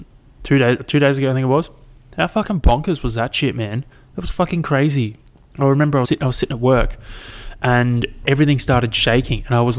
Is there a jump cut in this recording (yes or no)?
yes